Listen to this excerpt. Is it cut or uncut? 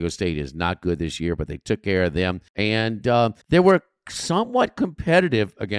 cut